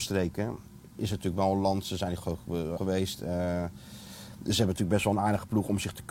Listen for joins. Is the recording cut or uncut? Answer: cut